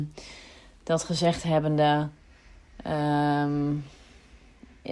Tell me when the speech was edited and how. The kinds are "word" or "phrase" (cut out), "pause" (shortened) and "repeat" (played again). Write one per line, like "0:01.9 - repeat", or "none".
none